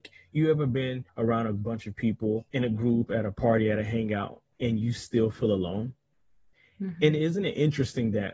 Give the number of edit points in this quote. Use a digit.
2